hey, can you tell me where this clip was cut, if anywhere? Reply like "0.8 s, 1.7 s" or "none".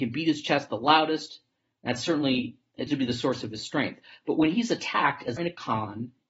2.9 s, 5.4 s